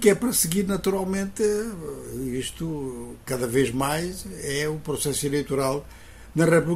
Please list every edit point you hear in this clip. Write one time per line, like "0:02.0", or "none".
none